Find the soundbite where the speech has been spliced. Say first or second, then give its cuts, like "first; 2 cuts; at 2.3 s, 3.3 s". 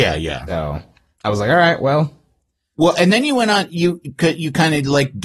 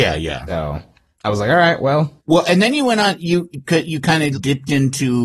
second; 2 cuts; at 2.2 s, 4.3 s